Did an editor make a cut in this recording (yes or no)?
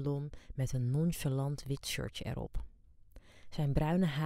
no